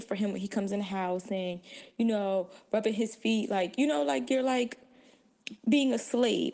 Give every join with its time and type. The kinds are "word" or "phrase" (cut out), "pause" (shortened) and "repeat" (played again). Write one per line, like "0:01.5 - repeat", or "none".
none